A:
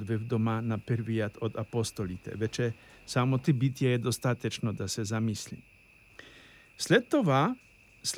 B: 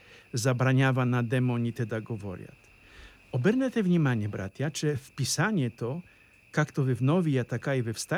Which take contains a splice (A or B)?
A